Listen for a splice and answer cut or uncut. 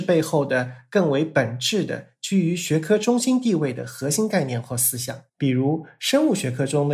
cut